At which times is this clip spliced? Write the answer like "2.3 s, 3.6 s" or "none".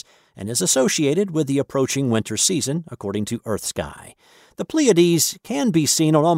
none